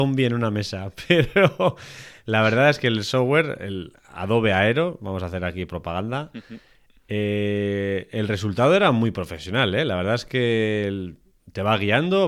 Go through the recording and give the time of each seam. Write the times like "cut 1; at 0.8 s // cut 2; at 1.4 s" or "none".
none